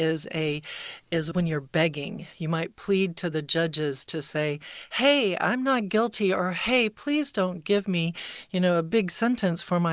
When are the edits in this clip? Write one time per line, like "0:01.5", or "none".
0:01.3